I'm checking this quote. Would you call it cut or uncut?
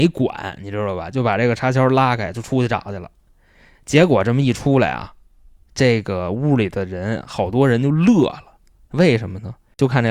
uncut